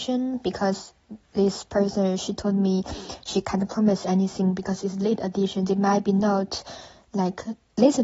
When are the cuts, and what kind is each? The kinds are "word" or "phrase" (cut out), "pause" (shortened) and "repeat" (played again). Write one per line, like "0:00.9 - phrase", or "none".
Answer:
0:01.2 - pause